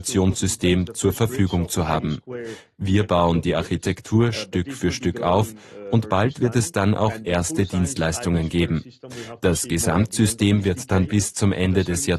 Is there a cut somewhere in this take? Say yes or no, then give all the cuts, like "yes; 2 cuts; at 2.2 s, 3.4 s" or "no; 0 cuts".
no; 0 cuts